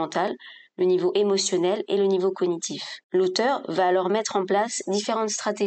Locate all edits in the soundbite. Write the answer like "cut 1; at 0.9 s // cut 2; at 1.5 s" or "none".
cut 1; at 3.0 s